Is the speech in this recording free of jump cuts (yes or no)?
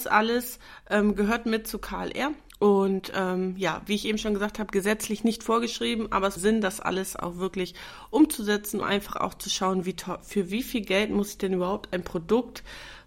no